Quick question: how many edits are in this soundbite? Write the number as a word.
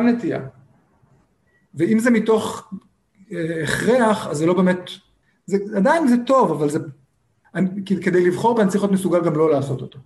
one